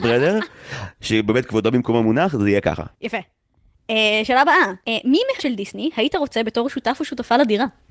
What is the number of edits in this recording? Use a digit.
3